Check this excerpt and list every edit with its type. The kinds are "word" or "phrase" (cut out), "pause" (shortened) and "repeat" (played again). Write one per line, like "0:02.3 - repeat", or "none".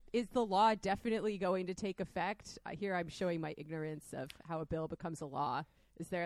none